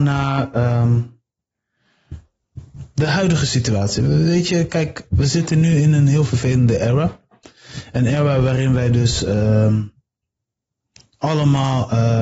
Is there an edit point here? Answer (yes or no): no